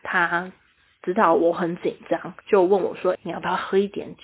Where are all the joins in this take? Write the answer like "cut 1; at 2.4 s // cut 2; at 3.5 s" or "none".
cut 1; at 2.4 s // cut 2; at 3.1 s

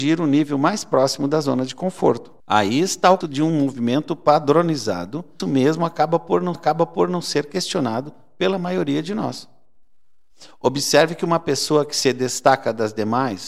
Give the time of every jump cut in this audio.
cut 1; at 2.4 s // cut 2; at 3.2 s // cut 3; at 5.4 s // cut 4; at 6.5 s

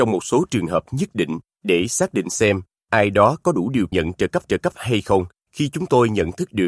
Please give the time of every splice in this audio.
cut 1; at 3.9 s // cut 2; at 4.4 s

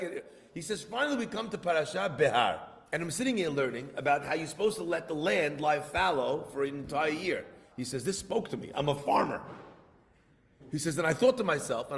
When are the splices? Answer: cut 1; at 2.9 s // cut 2; at 7.7 s

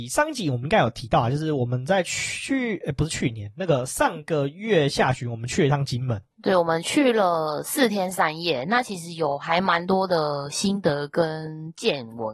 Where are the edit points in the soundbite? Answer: cut 1; at 6.3 s

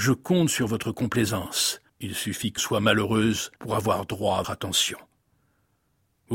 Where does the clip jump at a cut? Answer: cut 1; at 1.9 s // cut 2; at 2.6 s // cut 3; at 3.6 s // cut 4; at 4.4 s

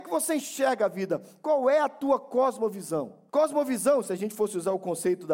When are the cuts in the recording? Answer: cut 1; at 3.3 s

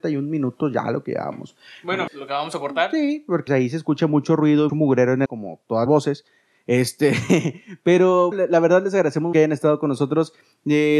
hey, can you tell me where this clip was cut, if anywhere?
cut 1; at 2.1 s // cut 2; at 3.5 s // cut 3; at 4.7 s // cut 4; at 5.2 s // cut 5; at 5.9 s // cut 6; at 8.3 s // cut 7; at 9.3 s

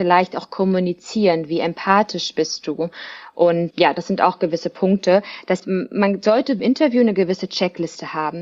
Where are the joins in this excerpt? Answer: cut 1; at 3.7 s // cut 2; at 5.6 s // cut 3; at 6.6 s

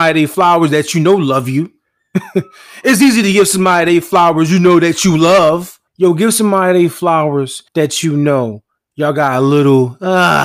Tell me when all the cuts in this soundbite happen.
cut 1; at 5.9 s // cut 2; at 7.7 s

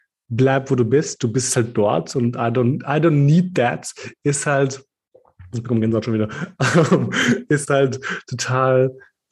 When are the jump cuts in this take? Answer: none

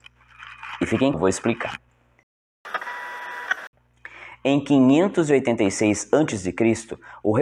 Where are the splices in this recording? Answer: cut 1; at 1.1 s

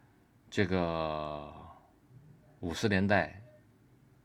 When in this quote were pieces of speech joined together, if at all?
none

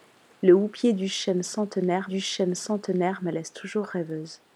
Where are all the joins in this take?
cut 1; at 2.1 s

